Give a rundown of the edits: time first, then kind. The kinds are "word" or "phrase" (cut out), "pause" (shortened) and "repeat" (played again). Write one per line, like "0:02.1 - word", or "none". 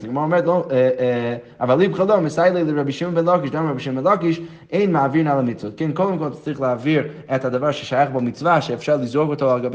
none